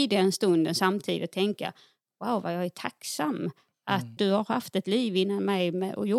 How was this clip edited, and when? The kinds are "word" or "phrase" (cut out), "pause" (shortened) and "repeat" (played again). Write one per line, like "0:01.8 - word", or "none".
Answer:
0:04.2 - word